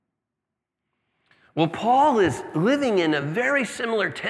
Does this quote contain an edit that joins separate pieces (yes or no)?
no